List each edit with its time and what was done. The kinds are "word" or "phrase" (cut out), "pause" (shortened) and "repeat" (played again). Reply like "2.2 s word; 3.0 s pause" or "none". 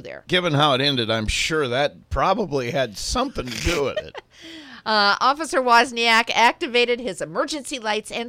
none